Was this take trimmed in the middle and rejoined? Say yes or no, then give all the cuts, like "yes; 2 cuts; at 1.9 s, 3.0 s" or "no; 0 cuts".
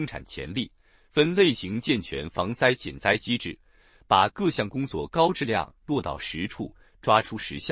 no; 0 cuts